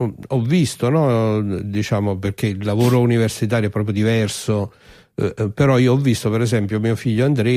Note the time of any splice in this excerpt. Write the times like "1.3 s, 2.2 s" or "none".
none